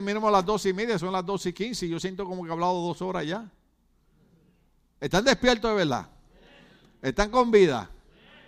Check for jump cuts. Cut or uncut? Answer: uncut